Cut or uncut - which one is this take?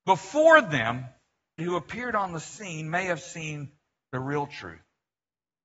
cut